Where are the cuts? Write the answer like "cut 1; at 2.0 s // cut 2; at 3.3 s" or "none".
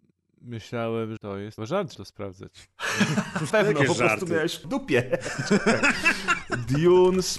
cut 1; at 1.2 s // cut 2; at 1.6 s // cut 3; at 1.9 s // cut 4; at 3.5 s // cut 5; at 4.6 s